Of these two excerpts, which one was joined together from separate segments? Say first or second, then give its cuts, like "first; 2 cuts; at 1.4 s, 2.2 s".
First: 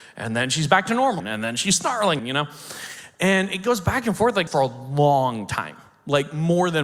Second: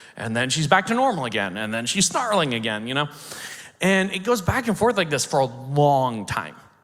first; 3 cuts; at 1.2 s, 2.2 s, 4.5 s